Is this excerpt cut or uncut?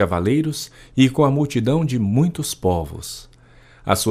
uncut